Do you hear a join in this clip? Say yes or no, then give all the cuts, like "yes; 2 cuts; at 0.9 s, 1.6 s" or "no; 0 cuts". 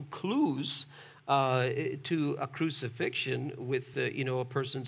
no; 0 cuts